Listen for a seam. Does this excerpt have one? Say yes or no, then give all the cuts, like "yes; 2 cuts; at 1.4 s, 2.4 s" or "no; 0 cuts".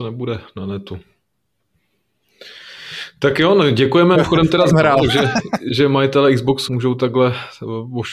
yes; 4 cuts; at 4.1 s, 4.7 s, 5.7 s, 6.7 s